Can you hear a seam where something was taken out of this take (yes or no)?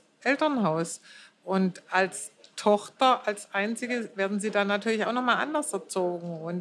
no